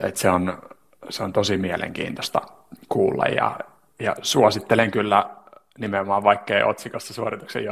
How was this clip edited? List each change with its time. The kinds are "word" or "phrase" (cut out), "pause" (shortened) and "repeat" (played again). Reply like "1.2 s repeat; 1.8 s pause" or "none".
none